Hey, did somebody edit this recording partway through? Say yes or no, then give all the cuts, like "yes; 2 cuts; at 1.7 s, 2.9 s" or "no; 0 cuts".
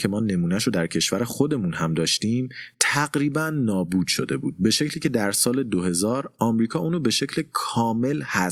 no; 0 cuts